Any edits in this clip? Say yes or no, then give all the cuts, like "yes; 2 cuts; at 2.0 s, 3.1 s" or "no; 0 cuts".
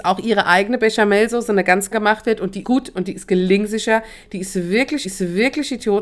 yes; 3 cuts; at 1.9 s, 2.6 s, 5.0 s